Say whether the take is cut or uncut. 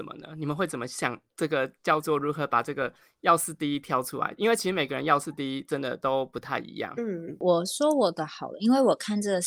uncut